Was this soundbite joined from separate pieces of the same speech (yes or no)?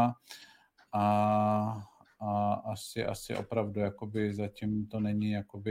no